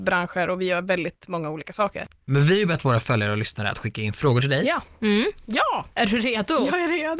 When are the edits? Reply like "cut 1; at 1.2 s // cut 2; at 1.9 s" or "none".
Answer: none